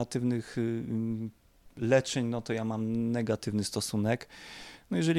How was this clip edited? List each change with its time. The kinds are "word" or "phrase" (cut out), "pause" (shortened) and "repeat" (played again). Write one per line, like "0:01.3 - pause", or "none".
0:01.7 - pause